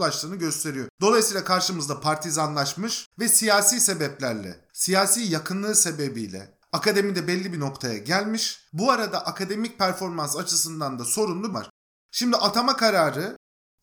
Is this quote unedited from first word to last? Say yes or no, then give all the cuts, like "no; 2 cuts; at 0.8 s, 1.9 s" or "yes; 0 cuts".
no; 3 cuts; at 0.9 s, 3.1 s, 11.5 s